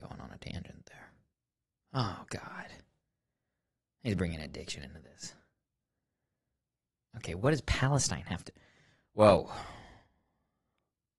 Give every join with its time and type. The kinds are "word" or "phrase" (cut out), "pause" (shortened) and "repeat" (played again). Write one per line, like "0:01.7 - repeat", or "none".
0:01.3 - pause